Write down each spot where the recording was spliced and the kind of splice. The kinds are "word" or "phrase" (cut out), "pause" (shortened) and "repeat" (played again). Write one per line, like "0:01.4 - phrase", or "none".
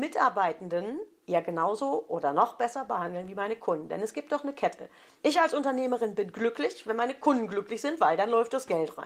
none